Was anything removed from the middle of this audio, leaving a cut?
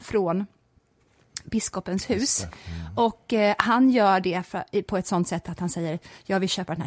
no; 0 cuts

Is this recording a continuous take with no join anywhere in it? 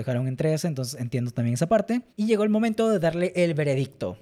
no; 1 cut; at 2.1 s

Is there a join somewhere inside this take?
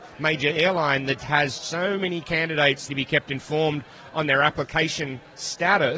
yes; 2 cuts; at 1.2 s, 2.9 s

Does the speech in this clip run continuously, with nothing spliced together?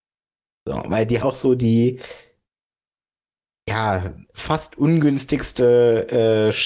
no; 2 cuts; at 1.2 s, 4.3 s

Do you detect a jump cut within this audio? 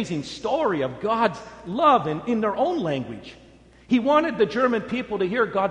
no; 0 cuts

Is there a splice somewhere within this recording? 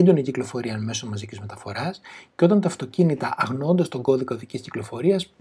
no; 0 cuts

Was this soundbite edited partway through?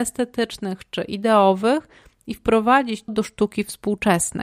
yes; 1 cut; at 3.1 s

